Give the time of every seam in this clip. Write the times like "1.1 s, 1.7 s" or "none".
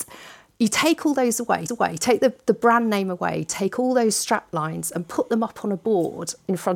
1.7 s